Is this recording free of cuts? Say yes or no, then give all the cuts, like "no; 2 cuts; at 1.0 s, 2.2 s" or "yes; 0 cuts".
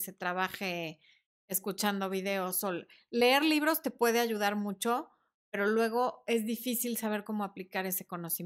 yes; 0 cuts